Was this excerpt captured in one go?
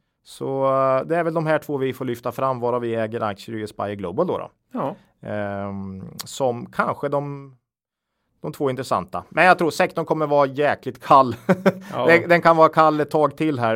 yes; 0 cuts

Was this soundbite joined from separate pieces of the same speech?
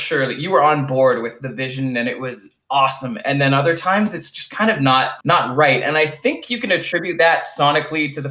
yes; 1 cut; at 5.2 s

